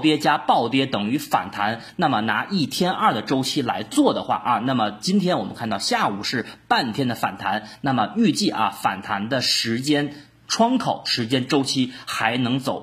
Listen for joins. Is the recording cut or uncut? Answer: uncut